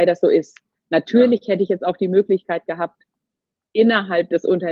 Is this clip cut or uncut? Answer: uncut